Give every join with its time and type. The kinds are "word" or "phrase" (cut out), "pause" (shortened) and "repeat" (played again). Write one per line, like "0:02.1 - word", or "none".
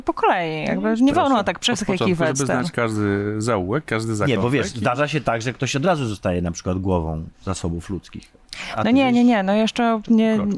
0:07.3 - pause